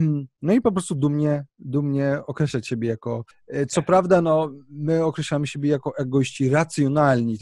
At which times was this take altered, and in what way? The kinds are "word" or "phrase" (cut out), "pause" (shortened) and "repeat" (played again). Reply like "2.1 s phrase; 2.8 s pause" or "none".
3.3 s pause